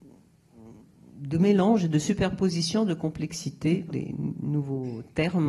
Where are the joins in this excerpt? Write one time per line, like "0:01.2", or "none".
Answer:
0:03.9

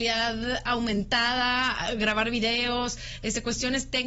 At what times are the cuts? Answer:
none

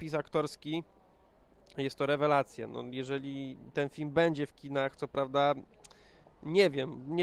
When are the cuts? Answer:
none

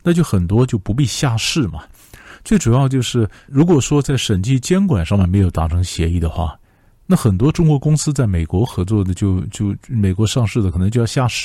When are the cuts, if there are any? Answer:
0:03.5

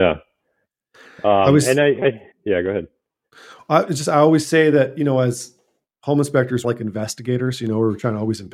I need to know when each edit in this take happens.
0:02.3
0:06.6

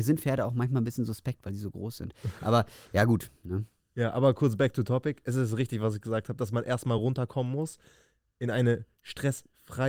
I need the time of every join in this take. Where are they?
none

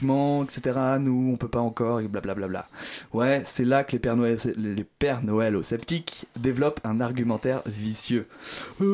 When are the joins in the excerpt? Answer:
none

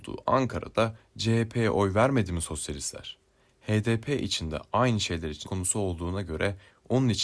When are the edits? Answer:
0:05.4

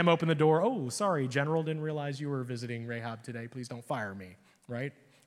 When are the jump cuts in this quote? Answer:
none

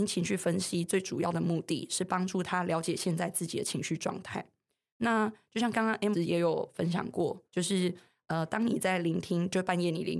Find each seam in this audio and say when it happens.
0:06.1
0:07.5

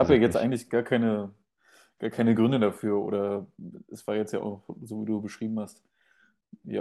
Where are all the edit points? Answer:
none

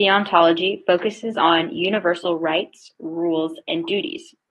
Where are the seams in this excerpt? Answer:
none

